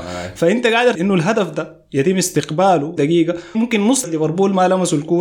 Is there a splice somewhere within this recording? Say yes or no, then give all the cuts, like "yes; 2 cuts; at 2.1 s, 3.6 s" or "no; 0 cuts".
yes; 4 cuts; at 0.9 s, 3.0 s, 3.5 s, 4.0 s